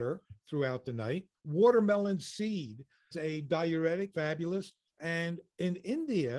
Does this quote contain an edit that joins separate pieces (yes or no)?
yes